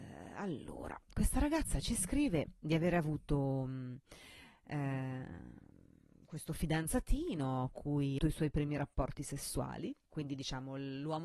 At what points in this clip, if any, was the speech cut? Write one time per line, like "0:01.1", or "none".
0:07.7
0:08.2
0:10.0